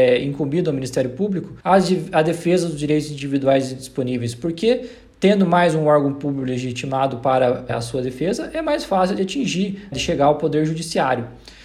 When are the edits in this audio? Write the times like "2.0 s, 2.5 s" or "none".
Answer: 1.6 s, 7.7 s, 9.9 s